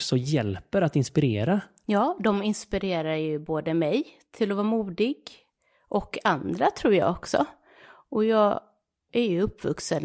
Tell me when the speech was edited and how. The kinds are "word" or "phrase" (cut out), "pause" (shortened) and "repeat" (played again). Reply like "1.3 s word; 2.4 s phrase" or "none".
none